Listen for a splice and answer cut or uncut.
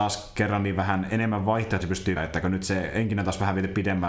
cut